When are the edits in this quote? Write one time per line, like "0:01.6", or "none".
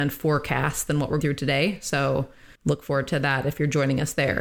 0:01.2
0:02.6